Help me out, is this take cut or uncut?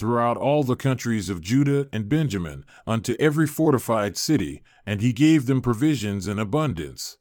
uncut